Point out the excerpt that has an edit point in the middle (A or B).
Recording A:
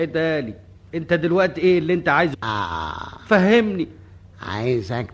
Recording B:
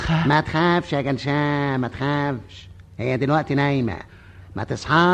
A